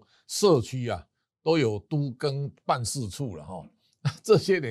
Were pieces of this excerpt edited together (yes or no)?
no